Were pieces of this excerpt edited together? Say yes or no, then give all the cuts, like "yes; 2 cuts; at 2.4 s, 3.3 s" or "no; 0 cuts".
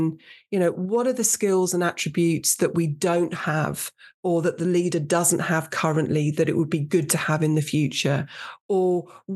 no; 0 cuts